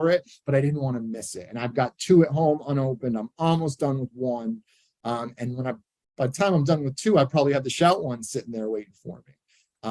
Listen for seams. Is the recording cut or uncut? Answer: uncut